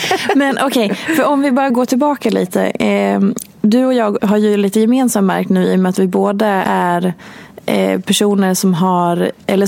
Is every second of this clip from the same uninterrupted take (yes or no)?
no